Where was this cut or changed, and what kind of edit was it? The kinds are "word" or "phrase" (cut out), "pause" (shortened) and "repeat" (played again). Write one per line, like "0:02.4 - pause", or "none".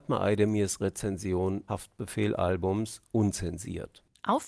0:01.7 - word